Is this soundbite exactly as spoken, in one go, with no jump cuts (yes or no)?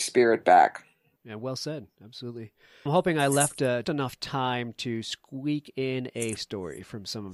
no